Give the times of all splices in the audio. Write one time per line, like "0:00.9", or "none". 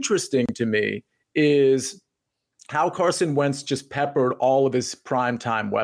none